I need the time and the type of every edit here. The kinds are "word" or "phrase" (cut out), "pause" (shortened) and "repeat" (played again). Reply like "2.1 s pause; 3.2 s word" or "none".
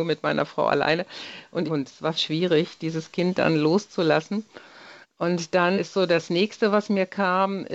1.6 s phrase; 2.1 s phrase; 5.0 s pause; 5.8 s word